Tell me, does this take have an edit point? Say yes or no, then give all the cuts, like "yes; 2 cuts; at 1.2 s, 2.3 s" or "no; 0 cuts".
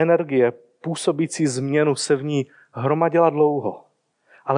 no; 0 cuts